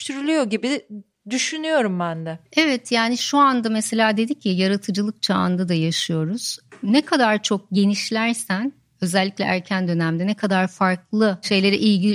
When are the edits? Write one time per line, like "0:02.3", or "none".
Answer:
none